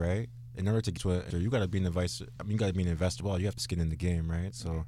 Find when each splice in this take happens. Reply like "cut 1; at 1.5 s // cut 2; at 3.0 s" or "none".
cut 1; at 1.0 s // cut 2; at 1.3 s // cut 3; at 2.4 s // cut 4; at 3.2 s // cut 5; at 3.6 s